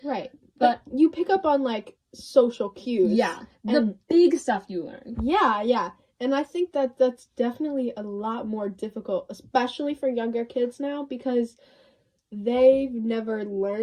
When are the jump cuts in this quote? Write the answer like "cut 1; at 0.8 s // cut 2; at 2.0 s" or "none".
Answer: none